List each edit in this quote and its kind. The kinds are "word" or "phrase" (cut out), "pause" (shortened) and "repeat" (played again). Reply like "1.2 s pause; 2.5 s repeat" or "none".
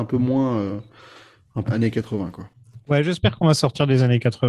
1.6 s phrase